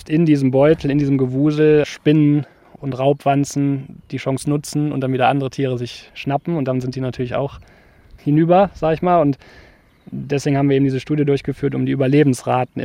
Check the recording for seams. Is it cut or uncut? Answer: uncut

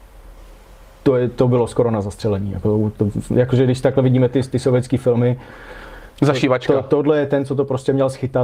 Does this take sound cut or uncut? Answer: uncut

